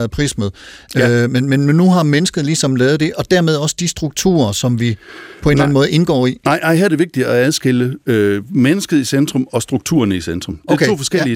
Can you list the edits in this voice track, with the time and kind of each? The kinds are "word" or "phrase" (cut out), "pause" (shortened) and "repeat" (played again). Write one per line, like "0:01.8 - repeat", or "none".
none